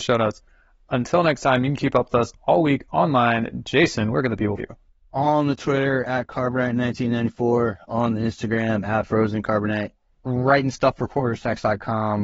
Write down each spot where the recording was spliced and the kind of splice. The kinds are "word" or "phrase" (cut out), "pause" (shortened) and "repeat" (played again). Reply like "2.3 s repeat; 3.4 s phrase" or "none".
4.6 s word; 10.2 s word